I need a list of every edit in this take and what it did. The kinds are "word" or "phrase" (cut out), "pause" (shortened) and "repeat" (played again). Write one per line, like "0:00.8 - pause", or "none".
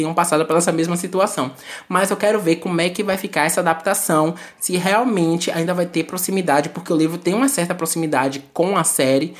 none